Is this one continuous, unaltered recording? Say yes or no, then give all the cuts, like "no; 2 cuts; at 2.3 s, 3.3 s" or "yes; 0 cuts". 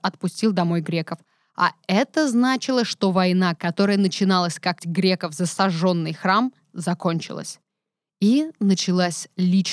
no; 1 cut; at 4.8 s